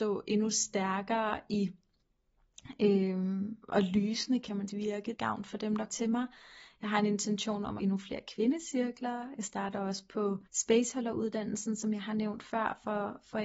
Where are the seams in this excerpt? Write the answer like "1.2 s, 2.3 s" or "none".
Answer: 3.6 s, 4.7 s, 5.1 s, 5.9 s, 7.8 s, 10.5 s